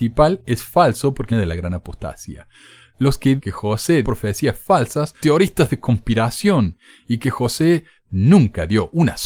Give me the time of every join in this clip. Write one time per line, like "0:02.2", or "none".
0:01.3
0:03.4
0:04.0
0:05.2
0:08.0